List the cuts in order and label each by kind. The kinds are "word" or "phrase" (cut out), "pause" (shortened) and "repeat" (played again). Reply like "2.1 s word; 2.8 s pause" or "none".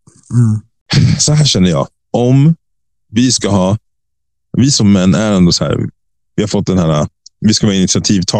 none